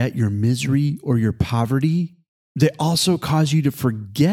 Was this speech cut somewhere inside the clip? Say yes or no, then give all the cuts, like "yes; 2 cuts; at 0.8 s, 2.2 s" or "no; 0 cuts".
no; 0 cuts